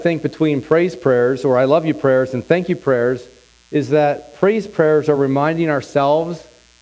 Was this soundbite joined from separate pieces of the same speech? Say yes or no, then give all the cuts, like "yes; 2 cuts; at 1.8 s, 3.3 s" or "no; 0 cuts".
no; 0 cuts